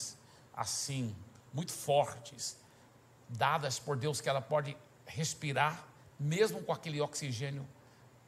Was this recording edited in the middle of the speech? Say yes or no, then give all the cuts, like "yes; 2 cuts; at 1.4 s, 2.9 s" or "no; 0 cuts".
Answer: no; 0 cuts